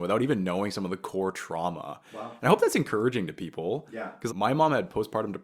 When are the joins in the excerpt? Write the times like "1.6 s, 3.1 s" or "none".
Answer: 4.3 s